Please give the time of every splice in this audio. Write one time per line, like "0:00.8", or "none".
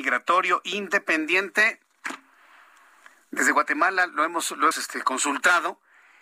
0:04.7